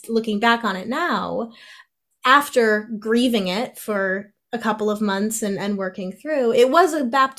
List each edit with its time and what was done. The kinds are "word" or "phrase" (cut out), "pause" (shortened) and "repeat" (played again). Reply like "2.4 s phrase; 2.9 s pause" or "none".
none